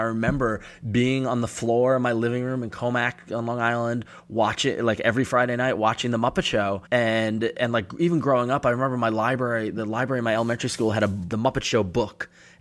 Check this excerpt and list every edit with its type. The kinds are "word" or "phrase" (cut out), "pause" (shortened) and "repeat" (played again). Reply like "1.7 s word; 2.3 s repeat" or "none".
6.9 s pause